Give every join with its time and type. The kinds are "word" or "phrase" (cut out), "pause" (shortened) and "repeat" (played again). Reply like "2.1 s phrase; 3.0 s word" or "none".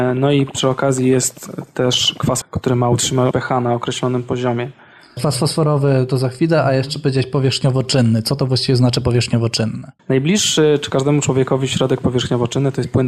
2.4 s word; 3.3 s word; 10.0 s pause